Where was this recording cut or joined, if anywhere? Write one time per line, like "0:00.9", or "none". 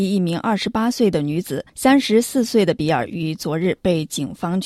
0:01.7